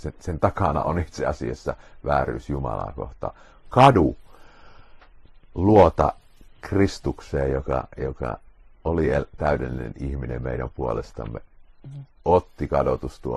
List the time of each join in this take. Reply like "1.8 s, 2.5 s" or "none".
none